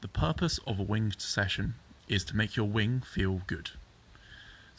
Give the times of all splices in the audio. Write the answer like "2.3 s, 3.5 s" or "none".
none